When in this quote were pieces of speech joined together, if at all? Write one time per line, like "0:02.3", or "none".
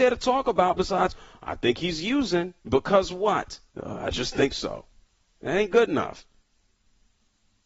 0:02.6
0:03.7
0:05.0